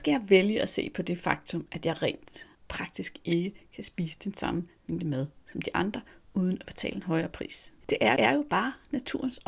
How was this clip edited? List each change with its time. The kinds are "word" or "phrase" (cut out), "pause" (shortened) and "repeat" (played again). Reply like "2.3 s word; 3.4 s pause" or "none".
8.2 s repeat